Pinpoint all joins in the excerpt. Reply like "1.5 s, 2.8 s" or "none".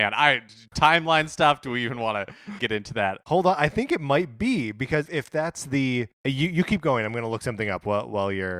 2.6 s, 5.1 s, 6.1 s